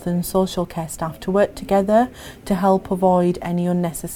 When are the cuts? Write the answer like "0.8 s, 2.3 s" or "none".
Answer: none

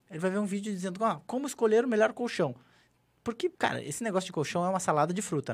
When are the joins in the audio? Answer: 3.5 s

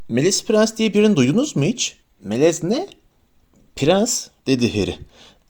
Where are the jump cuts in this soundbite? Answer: 2.0 s

